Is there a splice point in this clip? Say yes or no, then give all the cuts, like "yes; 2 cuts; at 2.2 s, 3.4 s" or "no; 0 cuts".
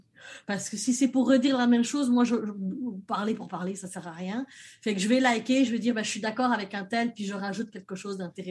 no; 0 cuts